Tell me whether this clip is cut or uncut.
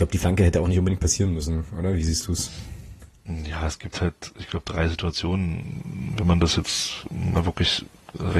uncut